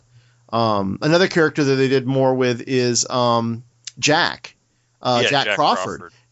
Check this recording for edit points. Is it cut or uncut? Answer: uncut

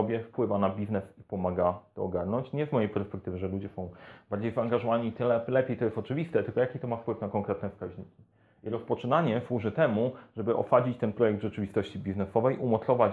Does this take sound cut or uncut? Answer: uncut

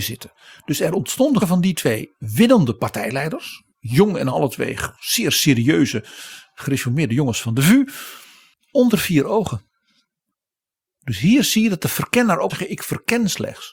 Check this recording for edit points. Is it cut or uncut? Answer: cut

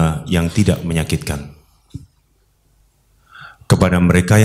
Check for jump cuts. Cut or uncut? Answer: uncut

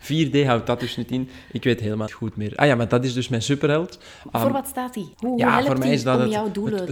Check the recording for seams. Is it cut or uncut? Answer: cut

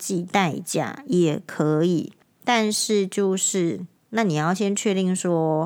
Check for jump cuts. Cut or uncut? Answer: cut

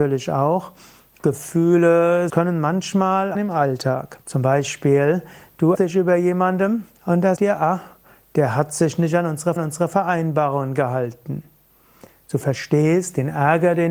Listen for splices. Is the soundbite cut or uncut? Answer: cut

